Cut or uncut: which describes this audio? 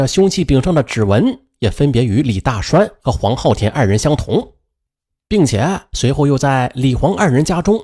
uncut